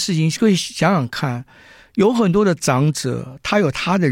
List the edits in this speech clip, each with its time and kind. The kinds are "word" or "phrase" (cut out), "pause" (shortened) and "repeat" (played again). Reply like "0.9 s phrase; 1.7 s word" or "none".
none

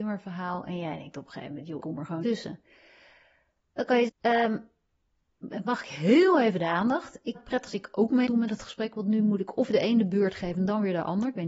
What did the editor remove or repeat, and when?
1.8 s word; 2.2 s word; 4.1 s word; 7.4 s word; 7.7 s word; 8.3 s word

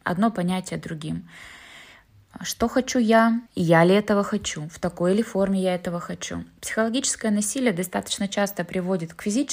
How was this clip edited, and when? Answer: 3.5 s pause

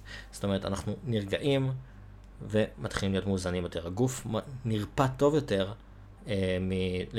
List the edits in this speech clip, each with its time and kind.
6.2 s pause

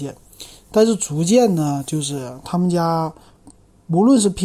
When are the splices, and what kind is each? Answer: none

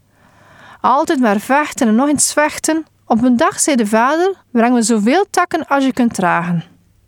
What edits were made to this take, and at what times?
2.9 s pause; 4.4 s pause

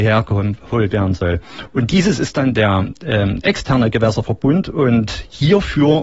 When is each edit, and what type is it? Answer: none

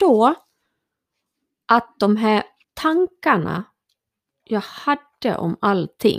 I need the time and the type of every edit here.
2.6 s pause

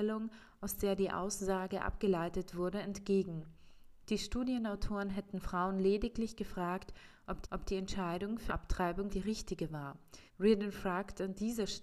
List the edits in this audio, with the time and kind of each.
7.4 s repeat; 8.5 s word; 9.1 s phrase; 10.3 s pause

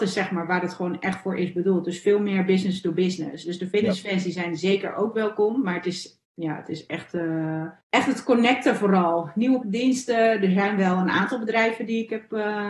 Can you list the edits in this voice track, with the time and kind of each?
6.2 s pause; 7.8 s pause; 9.6 s word

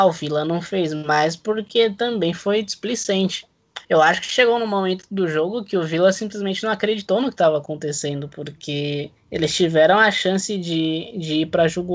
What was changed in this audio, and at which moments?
3.8 s pause; 9.2 s pause

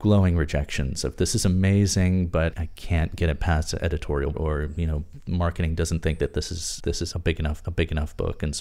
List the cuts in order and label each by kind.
2.5 s word; 4.3 s word; 6.8 s word; 7.1 s word; 7.6 s repeat

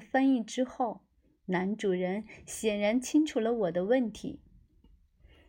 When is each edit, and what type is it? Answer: none

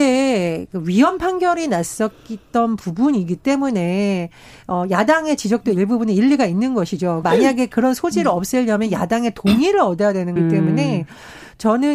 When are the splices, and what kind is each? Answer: 7.2 s word; 10.4 s word

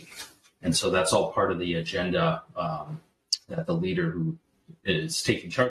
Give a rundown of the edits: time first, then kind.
none

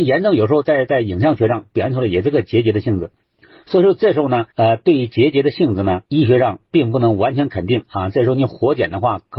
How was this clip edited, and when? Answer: 3.2 s pause; 4.5 s pause; 6.0 s pause

